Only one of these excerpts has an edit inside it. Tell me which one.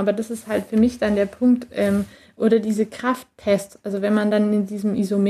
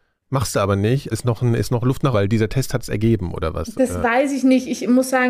second; 2 cuts; at 1.1 s, 2.1 s

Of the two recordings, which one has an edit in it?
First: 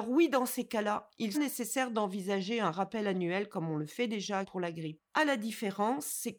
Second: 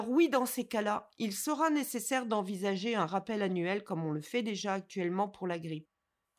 first; 3 cuts; at 1.3 s, 4.4 s, 5.1 s

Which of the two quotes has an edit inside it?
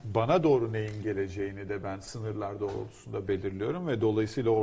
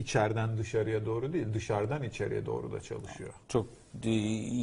second; 1 cut; at 3.4 s

